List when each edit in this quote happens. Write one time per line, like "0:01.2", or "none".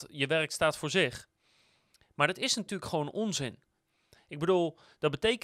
none